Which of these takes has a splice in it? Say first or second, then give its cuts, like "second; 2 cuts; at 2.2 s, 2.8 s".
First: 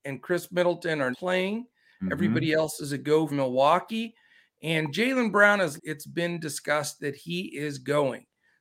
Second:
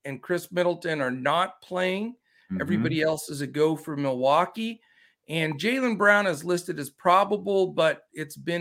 first; 3 cuts; at 1.1 s, 3.3 s, 5.8 s